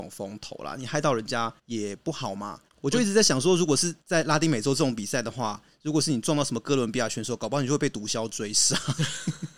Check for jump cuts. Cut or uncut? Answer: cut